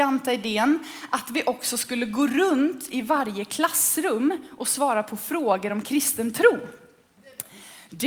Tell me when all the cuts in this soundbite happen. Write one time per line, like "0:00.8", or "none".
none